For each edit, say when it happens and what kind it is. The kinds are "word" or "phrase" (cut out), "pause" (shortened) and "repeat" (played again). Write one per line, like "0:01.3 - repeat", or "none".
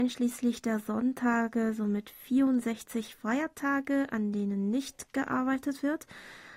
none